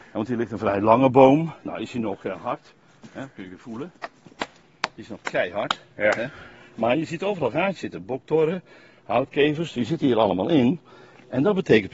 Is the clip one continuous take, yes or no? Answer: yes